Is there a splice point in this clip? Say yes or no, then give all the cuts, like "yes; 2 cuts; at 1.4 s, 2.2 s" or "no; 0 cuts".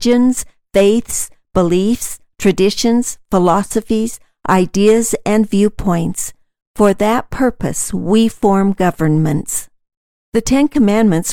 no; 0 cuts